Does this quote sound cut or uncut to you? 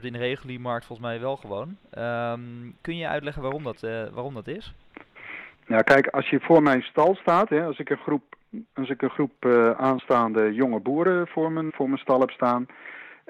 cut